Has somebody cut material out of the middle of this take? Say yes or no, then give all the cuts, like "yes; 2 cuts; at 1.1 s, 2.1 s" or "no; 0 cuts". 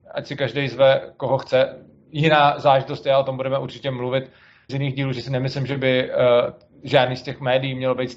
yes; 1 cut; at 4.7 s